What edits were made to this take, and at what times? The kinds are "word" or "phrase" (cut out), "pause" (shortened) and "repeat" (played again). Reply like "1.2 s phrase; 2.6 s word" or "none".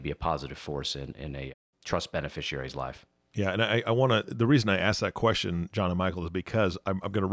none